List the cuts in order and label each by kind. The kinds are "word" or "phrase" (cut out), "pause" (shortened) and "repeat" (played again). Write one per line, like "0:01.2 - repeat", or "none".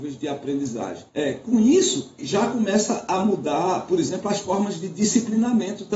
0:01.1 - pause
0:02.2 - phrase